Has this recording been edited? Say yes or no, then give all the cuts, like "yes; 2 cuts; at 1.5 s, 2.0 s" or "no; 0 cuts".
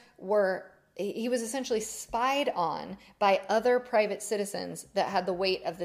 no; 0 cuts